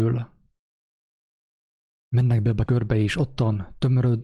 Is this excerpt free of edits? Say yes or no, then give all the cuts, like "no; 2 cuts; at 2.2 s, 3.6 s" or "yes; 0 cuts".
no; 1 cut; at 2.7 s